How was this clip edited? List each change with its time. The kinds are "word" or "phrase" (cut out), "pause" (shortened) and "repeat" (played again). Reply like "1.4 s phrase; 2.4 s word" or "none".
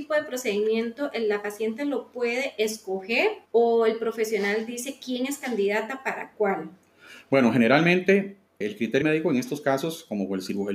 3.5 s pause; 8.6 s word; 9.0 s word

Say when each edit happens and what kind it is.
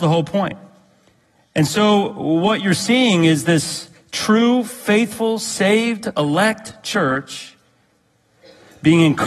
none

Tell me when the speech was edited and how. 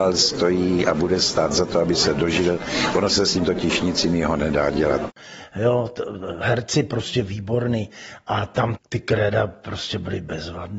8.8 s word

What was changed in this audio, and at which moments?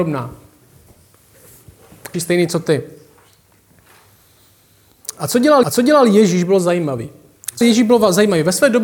2.1 s word; 5.6 s repeat; 7.6 s word

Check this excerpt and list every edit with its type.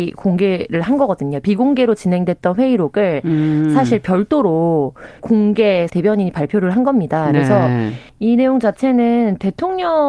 5.2 s word; 5.9 s word; 8.1 s pause

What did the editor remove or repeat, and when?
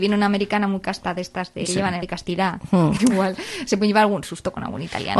1.7 s word; 2.0 s word; 3.0 s word

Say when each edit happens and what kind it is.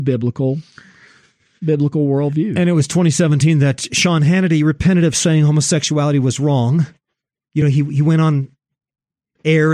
none

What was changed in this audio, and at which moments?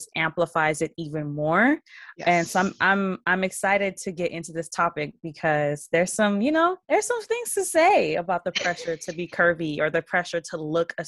6.8 s pause

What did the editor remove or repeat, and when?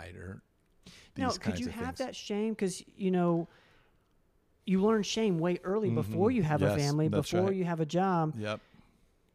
none

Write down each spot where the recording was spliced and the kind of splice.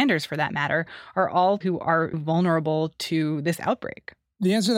1.6 s word; 2.1 s word

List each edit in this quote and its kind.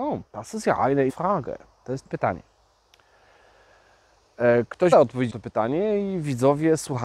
1.1 s word; 2.1 s word; 4.9 s word; 5.3 s word

